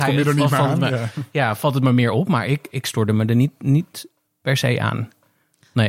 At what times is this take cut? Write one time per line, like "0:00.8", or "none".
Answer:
none

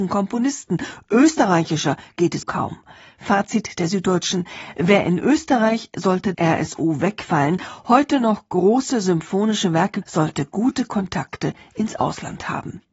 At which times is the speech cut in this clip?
0:02.4
0:06.3
0:10.0

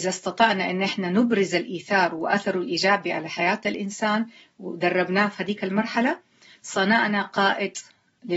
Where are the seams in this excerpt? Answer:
none

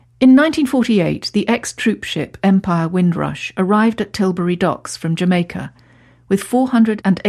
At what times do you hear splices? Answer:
none

